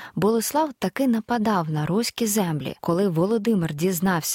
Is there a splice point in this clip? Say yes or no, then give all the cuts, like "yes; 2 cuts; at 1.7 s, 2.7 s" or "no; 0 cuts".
yes; 1 cut; at 2.8 s